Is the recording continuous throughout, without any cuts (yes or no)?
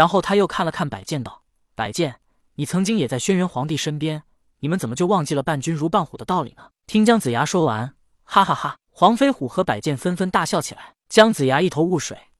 yes